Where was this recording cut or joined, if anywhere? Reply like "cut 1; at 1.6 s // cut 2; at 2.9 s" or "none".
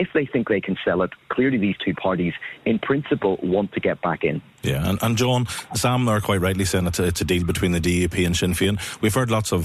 none